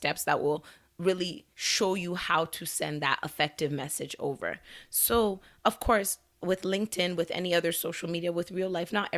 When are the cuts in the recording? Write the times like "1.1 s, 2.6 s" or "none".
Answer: 1.5 s